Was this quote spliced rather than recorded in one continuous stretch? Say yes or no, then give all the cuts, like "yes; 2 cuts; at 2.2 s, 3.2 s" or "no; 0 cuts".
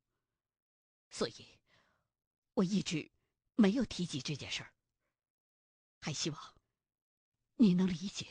no; 0 cuts